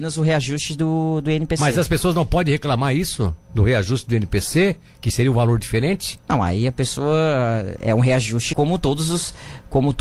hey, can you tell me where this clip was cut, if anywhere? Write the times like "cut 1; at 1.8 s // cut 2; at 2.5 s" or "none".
cut 1; at 3.4 s // cut 2; at 6.2 s // cut 3; at 7.8 s // cut 4; at 8.5 s